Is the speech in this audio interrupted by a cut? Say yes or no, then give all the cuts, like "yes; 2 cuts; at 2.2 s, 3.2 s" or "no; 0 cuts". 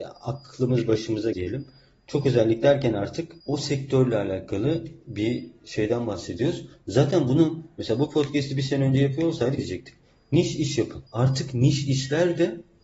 yes; 4 cuts; at 1.3 s, 3.4 s, 9.6 s, 11.1 s